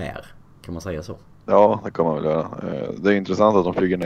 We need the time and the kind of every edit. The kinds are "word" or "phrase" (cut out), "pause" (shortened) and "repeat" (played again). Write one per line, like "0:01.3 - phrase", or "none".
0:01.4 - pause